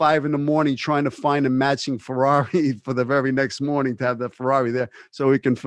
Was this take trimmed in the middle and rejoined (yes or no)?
no